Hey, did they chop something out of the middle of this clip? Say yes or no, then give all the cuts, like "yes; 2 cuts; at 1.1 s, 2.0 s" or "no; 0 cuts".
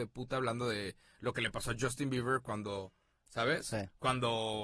no; 0 cuts